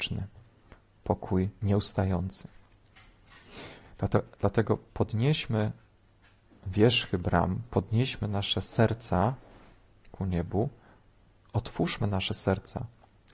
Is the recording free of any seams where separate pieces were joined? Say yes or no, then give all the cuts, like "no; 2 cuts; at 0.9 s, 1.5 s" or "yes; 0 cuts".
yes; 0 cuts